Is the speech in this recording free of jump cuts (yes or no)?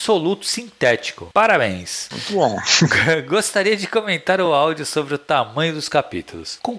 yes